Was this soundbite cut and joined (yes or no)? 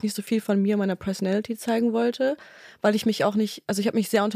no